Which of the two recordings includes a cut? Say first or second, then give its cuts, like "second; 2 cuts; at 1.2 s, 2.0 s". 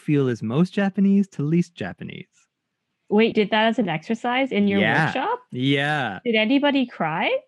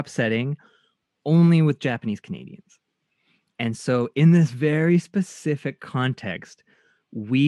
first; 1 cut; at 3.3 s